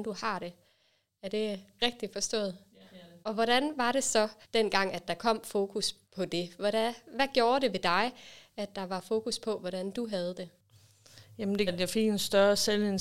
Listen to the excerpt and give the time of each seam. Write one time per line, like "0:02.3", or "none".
0:02.9
0:03.2
0:04.4
0:06.0
0:11.7